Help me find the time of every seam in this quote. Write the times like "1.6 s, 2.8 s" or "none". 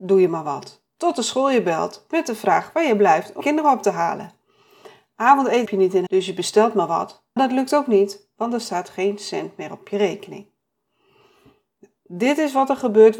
3.4 s, 5.6 s, 6.1 s, 7.4 s